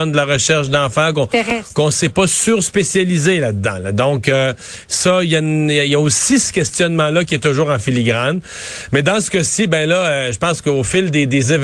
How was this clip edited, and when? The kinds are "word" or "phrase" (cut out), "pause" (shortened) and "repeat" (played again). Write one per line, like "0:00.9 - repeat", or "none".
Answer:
none